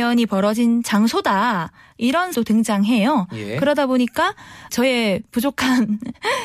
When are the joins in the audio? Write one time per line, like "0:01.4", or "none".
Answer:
0:02.3
0:04.7